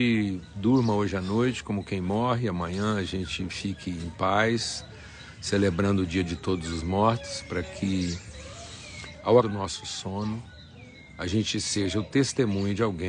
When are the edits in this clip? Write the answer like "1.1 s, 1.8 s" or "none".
9.4 s

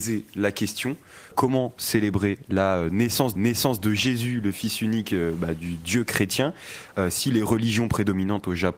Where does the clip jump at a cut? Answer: 1.3 s, 3.4 s

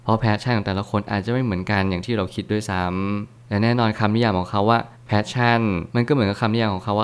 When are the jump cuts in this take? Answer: 5.9 s

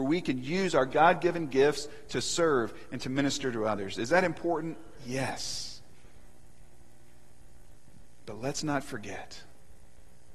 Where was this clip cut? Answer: none

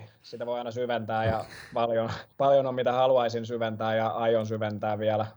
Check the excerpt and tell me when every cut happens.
2.3 s

